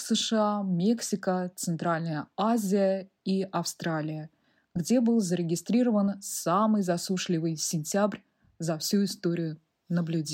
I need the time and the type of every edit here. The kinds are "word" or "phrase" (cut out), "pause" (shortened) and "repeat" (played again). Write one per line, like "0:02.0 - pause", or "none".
none